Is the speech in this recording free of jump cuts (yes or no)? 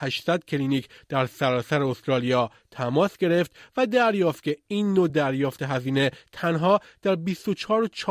yes